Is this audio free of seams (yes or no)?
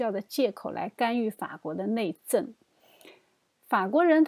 yes